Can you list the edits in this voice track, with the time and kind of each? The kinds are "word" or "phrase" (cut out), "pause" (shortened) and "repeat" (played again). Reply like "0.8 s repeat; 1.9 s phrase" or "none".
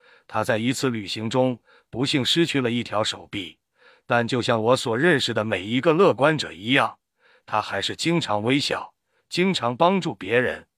none